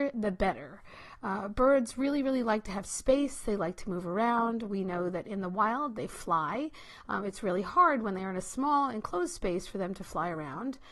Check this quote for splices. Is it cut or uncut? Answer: uncut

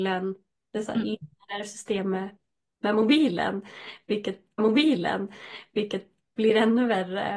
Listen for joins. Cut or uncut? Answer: cut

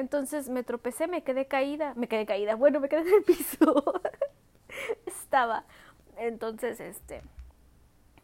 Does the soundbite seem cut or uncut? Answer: cut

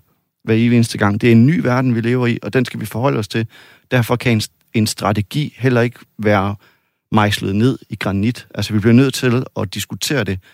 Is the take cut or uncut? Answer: uncut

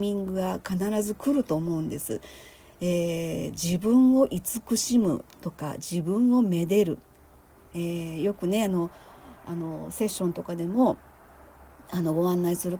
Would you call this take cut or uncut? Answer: uncut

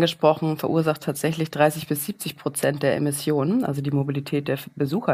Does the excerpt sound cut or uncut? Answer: uncut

